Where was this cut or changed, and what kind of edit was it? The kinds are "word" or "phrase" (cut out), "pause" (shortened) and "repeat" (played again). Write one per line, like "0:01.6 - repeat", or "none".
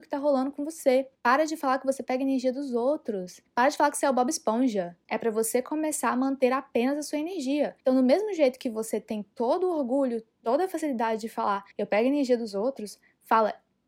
0:01.1 - pause
0:03.5 - pause
0:07.8 - pause
0:11.7 - pause